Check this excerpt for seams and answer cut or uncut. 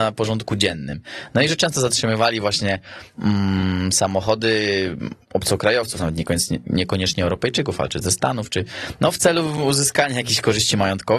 cut